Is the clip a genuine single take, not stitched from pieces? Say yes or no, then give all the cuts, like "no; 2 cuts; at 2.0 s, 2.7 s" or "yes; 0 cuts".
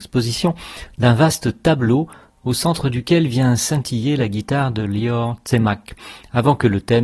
yes; 0 cuts